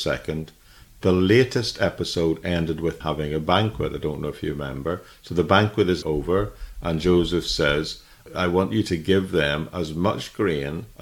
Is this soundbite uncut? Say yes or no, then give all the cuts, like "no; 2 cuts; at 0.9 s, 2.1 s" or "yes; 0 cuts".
no; 2 cuts; at 3.0 s, 6.0 s